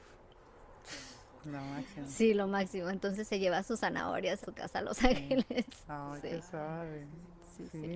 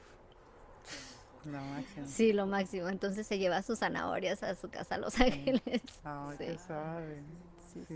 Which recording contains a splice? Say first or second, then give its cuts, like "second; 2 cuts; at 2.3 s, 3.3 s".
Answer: first; 1 cut; at 4.4 s